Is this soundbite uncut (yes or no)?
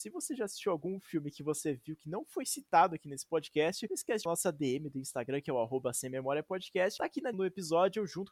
no